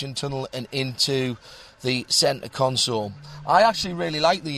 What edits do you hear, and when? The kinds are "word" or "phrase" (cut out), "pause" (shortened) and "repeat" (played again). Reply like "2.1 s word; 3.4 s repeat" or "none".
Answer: none

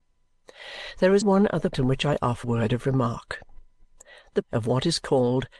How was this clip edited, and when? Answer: 1.2 s word; 1.7 s word; 2.4 s word; 4.4 s word

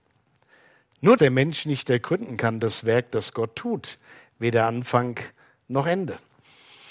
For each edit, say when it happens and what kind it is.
1.2 s word

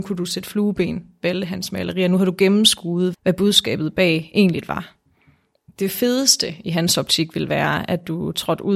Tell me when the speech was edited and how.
3.1 s word

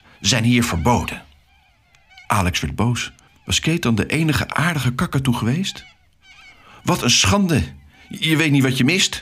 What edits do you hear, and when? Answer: 2.2 s pause; 3.3 s pause

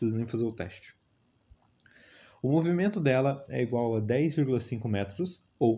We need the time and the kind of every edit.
none

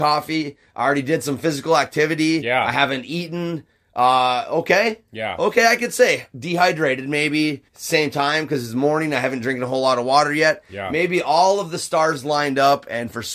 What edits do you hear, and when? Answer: 7.7 s pause

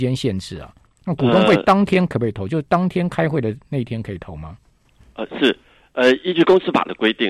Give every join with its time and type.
none

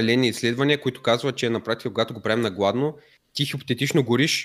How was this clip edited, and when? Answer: none

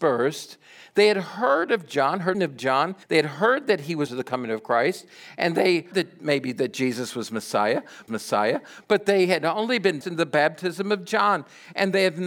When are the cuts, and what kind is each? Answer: 2.3 s phrase; 3.0 s pause; 4.1 s phrase; 5.9 s word; 8.1 s repeat; 10.0 s word

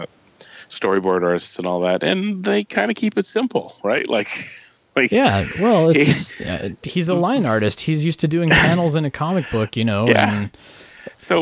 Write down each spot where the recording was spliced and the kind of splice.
none

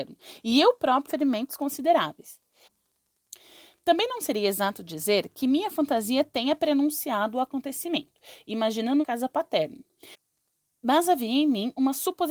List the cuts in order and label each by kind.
1.1 s word; 9.0 s phrase

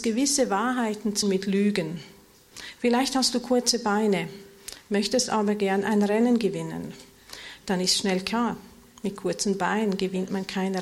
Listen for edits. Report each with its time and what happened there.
1.2 s word

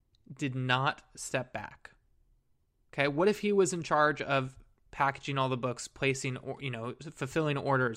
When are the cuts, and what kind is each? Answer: none

